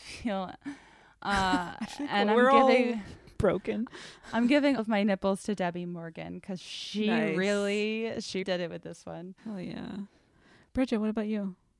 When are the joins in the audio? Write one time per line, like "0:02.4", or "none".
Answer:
0:04.8
0:08.4
0:09.4